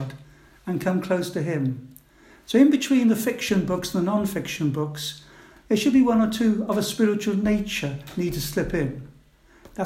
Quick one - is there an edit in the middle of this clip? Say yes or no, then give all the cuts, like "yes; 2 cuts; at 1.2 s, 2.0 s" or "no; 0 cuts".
no; 0 cuts